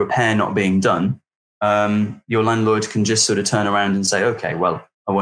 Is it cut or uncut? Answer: uncut